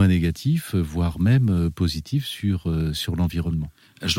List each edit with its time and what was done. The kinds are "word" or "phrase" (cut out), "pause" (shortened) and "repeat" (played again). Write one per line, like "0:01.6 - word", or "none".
none